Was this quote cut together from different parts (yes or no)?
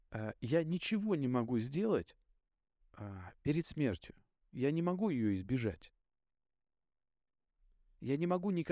no